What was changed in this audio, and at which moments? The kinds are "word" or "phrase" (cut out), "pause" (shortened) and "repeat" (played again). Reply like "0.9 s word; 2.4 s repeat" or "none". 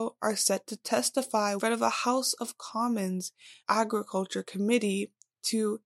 1.6 s phrase; 3.6 s pause